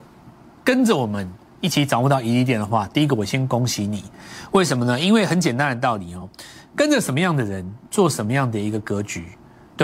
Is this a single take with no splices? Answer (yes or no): yes